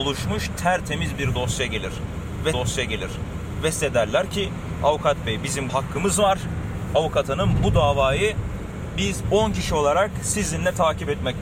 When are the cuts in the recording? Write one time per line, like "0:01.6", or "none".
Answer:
0:02.5
0:05.7